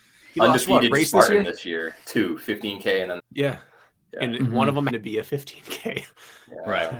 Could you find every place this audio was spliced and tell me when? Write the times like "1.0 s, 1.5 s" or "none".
0.9 s, 2.0 s, 3.2 s, 4.9 s